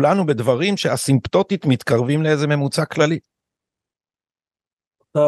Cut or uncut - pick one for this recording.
uncut